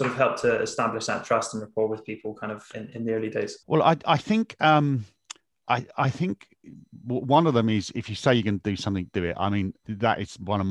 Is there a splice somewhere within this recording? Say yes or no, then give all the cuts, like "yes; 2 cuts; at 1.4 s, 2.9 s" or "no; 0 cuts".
yes; 4 cuts; at 2.7 s, 3.6 s, 5.4 s, 9.8 s